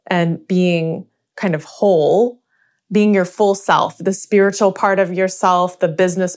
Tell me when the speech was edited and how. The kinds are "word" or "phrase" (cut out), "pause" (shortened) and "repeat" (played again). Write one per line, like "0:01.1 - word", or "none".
none